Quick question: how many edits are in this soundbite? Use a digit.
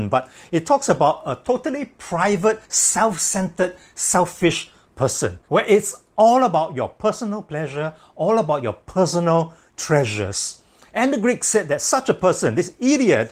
2